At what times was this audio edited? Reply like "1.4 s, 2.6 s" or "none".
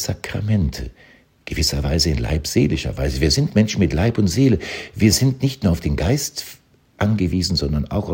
none